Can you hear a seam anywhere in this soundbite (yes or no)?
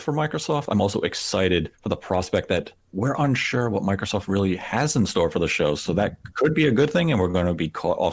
yes